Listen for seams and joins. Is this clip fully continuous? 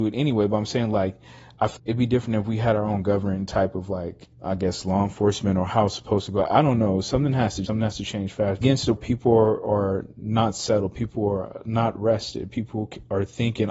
no; 5 cuts; at 1.8 s, 4.3 s, 7.7 s, 8.6 s, 9.0 s

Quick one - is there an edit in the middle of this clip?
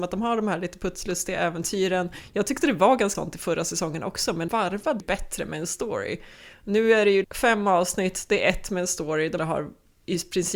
yes; 5 cuts; at 3.1 s, 4.5 s, 5.0 s, 7.2 s, 9.4 s

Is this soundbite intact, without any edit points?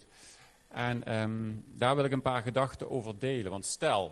yes; 0 cuts

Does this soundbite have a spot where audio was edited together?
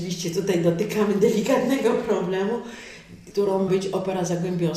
yes; 2 cuts; at 3.3 s, 3.7 s

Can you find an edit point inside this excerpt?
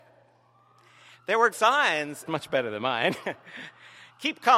yes; 2 cuts; at 1.5 s, 2.3 s

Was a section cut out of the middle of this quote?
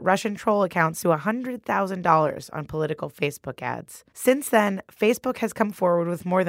yes; 2 cuts; at 1.0 s, 4.1 s

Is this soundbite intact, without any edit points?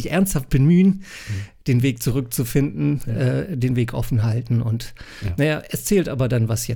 yes; 0 cuts

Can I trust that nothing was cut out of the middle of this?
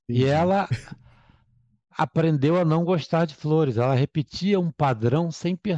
yes; 0 cuts

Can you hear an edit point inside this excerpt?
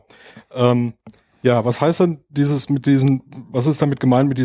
no; 0 cuts

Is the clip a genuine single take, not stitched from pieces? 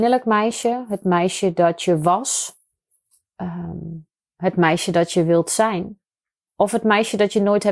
yes; 0 cuts

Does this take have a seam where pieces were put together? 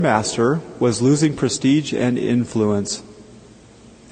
no; 0 cuts

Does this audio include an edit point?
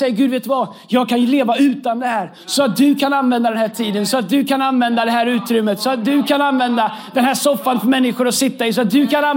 no; 0 cuts

